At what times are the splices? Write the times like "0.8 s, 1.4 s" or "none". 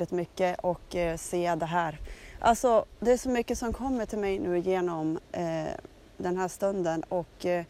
none